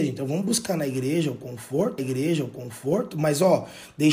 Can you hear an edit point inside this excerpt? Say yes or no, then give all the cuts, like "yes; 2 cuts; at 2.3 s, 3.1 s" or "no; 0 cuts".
yes; 1 cut; at 2.0 s